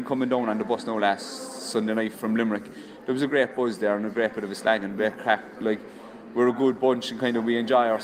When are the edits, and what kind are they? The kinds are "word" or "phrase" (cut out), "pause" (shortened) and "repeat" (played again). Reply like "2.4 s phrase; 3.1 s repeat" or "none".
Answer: 2.1 s word